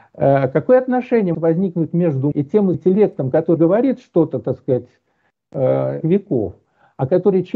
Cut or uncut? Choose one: cut